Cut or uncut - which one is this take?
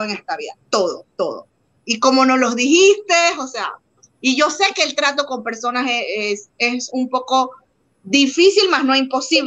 uncut